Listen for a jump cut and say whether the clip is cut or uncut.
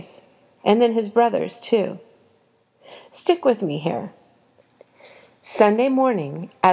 uncut